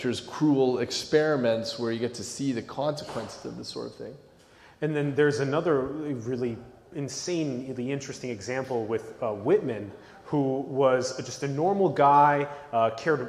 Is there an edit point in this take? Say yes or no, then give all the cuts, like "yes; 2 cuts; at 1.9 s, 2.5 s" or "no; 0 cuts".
no; 0 cuts